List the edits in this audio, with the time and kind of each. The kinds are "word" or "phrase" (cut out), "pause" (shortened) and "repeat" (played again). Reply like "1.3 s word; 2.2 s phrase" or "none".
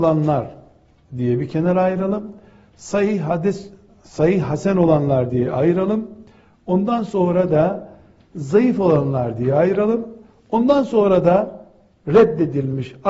none